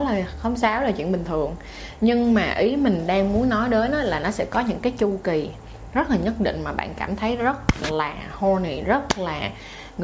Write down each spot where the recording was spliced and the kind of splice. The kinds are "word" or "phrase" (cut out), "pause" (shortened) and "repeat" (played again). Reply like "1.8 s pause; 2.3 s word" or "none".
none